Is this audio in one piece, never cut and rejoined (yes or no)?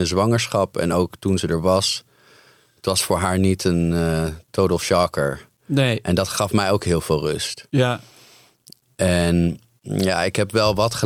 yes